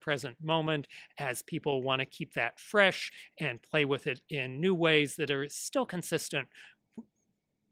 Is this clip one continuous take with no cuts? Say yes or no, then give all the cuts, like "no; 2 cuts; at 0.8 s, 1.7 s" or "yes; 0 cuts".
yes; 0 cuts